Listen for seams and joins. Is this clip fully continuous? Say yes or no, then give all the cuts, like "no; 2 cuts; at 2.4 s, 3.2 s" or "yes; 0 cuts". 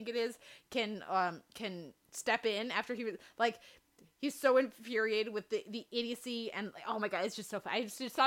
yes; 0 cuts